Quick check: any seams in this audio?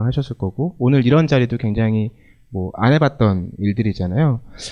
no; 0 cuts

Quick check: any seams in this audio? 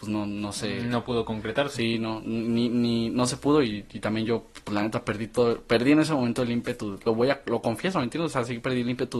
no; 0 cuts

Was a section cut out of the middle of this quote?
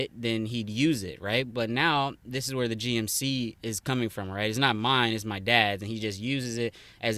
no; 0 cuts

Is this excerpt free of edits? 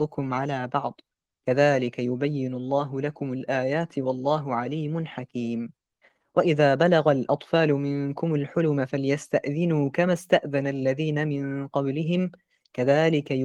yes; 0 cuts

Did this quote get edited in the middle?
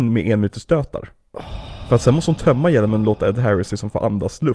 no; 0 cuts

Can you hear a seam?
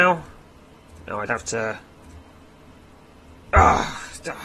yes; 1 cut; at 1.3 s

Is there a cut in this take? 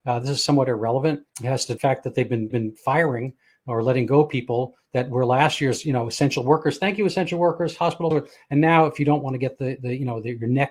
yes; 4 cuts; at 1.3 s, 1.8 s, 2.5 s, 8.1 s

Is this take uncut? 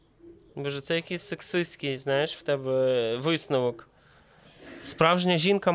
yes; 0 cuts

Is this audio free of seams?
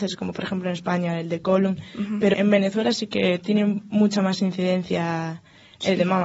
no; 1 cut; at 2.3 s

